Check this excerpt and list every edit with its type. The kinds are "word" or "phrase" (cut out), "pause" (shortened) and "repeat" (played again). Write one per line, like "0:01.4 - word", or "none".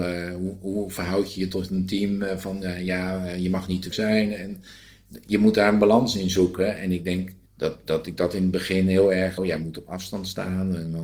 0:03.9 - word
0:07.5 - pause
0:09.4 - phrase